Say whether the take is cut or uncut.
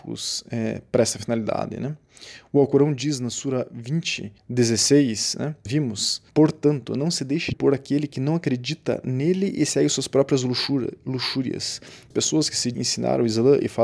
cut